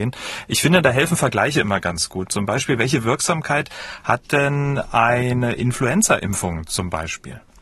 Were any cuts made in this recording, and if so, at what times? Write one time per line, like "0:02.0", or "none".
none